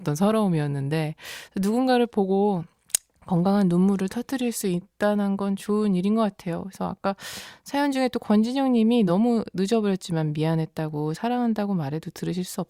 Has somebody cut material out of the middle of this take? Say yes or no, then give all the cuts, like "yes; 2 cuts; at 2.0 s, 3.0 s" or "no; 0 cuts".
no; 0 cuts